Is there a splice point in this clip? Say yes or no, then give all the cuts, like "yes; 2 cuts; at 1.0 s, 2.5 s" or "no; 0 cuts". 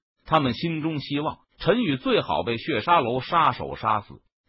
yes; 1 cut; at 1.5 s